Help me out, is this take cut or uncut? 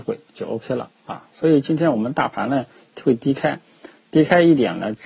uncut